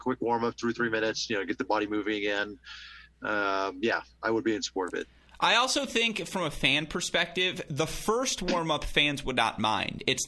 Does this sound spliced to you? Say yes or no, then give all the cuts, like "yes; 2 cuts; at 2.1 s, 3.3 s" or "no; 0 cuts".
no; 0 cuts